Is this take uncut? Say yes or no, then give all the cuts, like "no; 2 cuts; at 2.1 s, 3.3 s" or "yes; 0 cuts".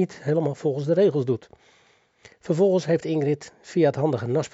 yes; 0 cuts